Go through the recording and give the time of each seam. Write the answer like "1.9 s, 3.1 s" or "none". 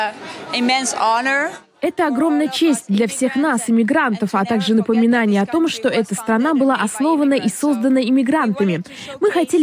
none